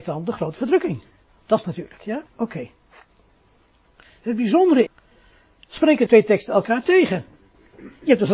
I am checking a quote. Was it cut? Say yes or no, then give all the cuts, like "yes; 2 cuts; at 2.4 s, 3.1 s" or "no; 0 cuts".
yes; 6 cuts; at 1.3 s, 1.6 s, 2.3 s, 3.9 s, 4.9 s, 6.1 s